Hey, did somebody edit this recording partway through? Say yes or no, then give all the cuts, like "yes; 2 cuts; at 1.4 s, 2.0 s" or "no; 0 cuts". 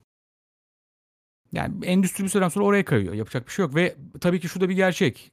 no; 0 cuts